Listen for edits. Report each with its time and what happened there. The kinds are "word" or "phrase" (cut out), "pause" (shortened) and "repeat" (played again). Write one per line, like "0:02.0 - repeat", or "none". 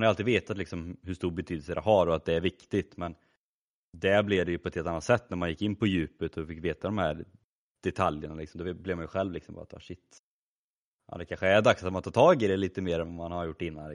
none